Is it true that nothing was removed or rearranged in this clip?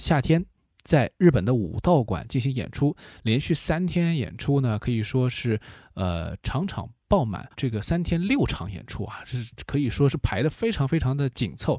no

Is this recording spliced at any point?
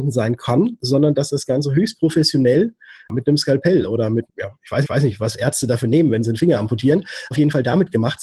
yes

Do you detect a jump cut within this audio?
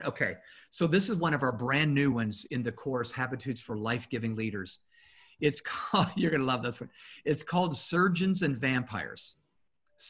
no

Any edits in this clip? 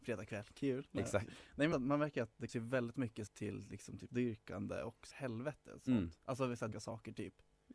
yes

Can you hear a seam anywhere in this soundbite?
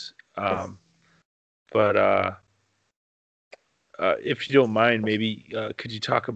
no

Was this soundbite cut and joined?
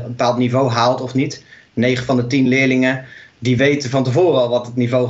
no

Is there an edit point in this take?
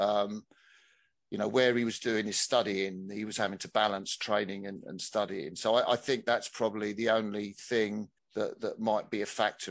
yes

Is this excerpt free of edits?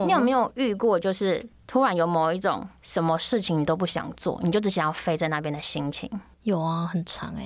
no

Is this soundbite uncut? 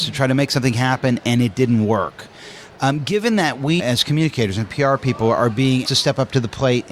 no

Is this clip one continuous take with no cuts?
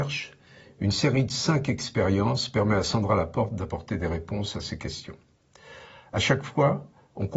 yes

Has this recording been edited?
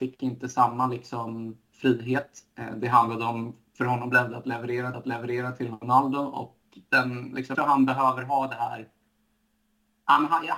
yes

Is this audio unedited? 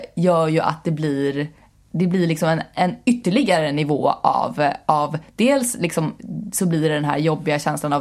yes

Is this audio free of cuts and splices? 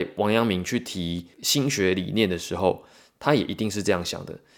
yes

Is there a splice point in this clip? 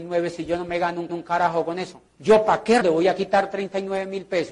yes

